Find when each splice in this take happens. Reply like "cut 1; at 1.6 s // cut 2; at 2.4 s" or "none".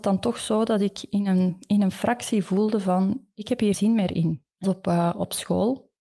cut 1; at 3.7 s // cut 2; at 4.6 s